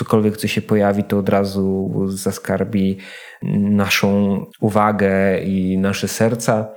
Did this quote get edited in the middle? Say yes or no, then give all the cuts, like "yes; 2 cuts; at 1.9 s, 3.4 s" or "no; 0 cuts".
yes; 1 cut; at 4.5 s